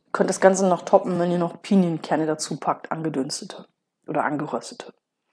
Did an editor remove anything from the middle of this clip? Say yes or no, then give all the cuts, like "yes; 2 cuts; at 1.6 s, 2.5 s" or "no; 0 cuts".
no; 0 cuts